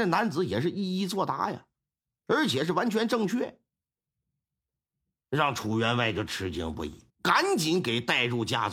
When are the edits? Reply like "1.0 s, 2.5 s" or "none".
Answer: 7.1 s

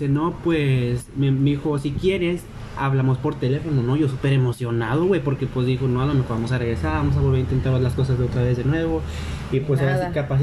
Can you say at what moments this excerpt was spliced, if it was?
none

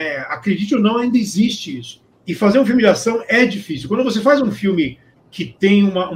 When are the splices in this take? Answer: none

